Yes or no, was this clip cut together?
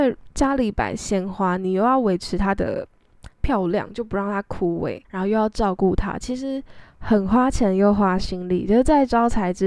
yes